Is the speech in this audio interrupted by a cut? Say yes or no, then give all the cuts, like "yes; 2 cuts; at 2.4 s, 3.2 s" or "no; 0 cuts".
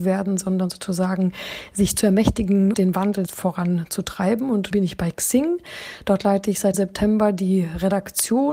yes; 4 cuts; at 2.7 s, 3.3 s, 4.7 s, 6.7 s